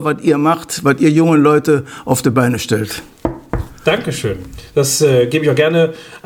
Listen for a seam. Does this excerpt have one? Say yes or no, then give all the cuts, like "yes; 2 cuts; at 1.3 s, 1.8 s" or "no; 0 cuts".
no; 0 cuts